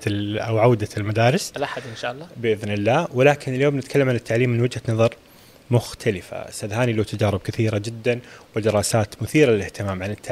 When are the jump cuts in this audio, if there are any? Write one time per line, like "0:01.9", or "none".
none